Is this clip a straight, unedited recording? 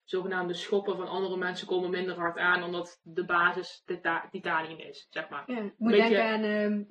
yes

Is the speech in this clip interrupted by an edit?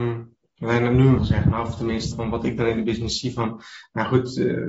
yes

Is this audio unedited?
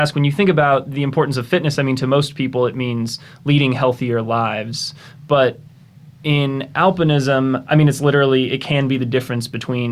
yes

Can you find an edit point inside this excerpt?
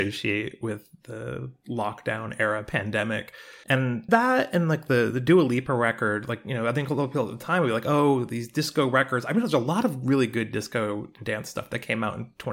no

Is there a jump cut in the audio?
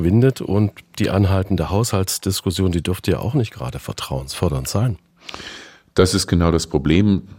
no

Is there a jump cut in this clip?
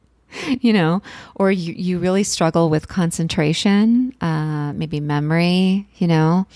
no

